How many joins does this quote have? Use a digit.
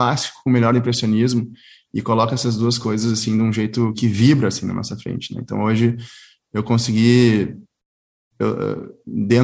1